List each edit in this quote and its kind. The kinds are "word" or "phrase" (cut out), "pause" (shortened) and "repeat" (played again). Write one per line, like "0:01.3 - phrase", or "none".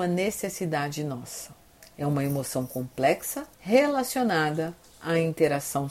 0:01.7 - pause
0:03.5 - pause